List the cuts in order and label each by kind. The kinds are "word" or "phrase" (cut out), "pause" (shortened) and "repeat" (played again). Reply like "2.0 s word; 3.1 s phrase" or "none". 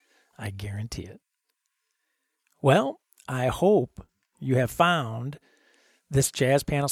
none